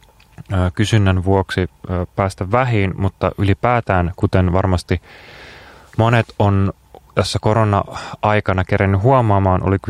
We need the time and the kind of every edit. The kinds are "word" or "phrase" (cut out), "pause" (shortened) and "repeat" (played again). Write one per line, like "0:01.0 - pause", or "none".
none